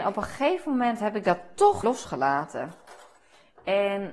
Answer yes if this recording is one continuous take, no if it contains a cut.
no